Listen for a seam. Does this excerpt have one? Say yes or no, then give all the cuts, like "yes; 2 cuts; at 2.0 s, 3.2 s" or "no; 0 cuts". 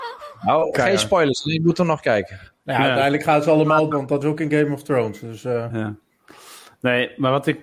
yes; 3 cuts; at 3.9 s, 4.2 s, 5.7 s